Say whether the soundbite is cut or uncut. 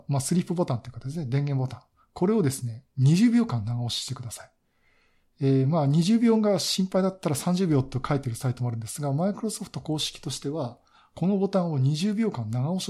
uncut